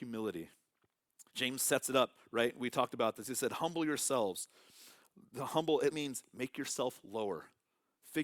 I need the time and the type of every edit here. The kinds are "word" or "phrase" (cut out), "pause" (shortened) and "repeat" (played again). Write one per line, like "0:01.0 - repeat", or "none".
0:01.3 - pause
0:05.9 - word